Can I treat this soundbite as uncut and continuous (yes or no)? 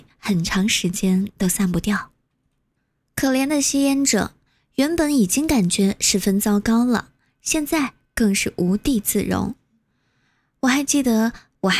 yes